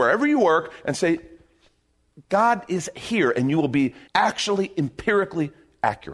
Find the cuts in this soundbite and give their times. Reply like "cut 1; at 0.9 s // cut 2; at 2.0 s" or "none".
cut 1; at 4.1 s